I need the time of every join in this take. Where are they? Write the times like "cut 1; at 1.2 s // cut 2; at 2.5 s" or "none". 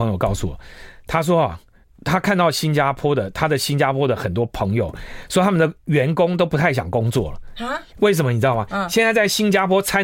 cut 1; at 1.8 s // cut 2; at 5.8 s // cut 3; at 7.9 s